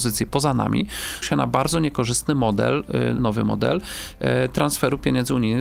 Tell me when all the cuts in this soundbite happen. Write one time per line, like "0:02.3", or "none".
0:01.2
0:03.2

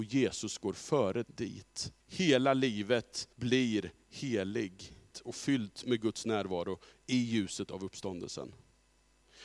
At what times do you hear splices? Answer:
0:01.2
0:02.0
0:03.3
0:05.1

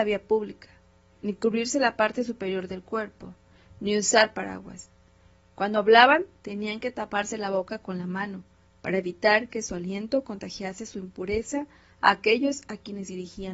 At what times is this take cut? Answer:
none

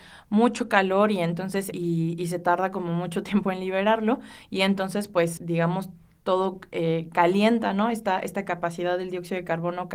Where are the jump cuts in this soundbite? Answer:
0:01.7
0:05.4

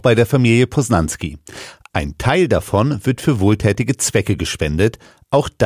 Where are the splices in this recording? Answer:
none

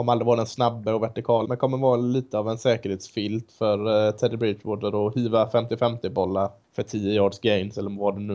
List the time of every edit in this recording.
0:01.4
0:06.6

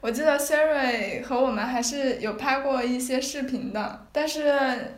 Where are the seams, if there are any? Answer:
none

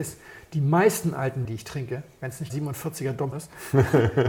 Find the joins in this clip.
0:01.4
0:02.5
0:03.3

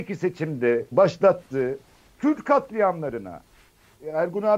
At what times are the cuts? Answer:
0:00.9

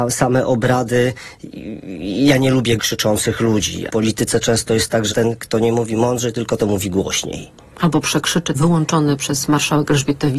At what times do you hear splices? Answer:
0:02.8
0:03.9
0:05.1
0:06.6
0:08.5

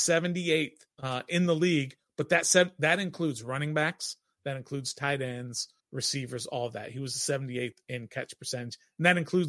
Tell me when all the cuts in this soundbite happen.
0:00.9
0:05.8

